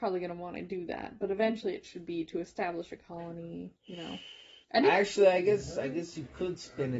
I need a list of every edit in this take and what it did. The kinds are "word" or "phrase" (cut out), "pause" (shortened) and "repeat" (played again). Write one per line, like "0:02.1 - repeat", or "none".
0:03.8 - pause
0:04.6 - pause